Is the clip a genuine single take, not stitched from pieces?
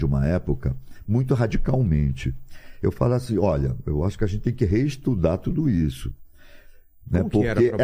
yes; 0 cuts

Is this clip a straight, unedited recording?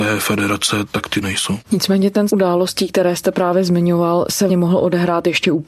no; 3 cuts; at 1.2 s, 2.3 s, 4.5 s

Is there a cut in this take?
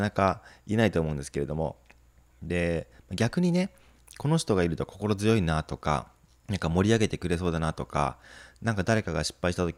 yes; 2 cuts; at 2.1 s, 6.3 s

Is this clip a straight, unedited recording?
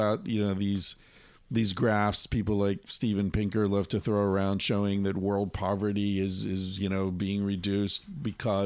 yes; 0 cuts

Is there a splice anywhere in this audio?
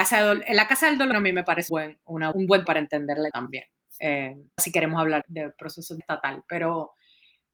yes; 8 cuts; at 1.1 s, 1.7 s, 2.3 s, 2.7 s, 3.3 s, 4.6 s, 5.2 s, 6.0 s

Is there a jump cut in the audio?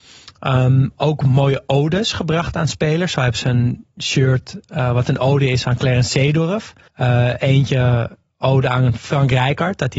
yes; 1 cut; at 6.9 s

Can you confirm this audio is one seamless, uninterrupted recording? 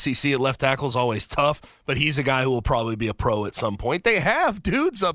yes; 0 cuts

